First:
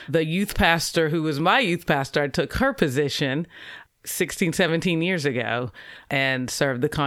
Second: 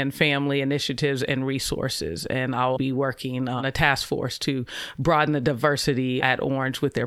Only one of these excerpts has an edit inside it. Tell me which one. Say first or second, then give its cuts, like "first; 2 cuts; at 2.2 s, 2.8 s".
second; 1 cut; at 2.8 s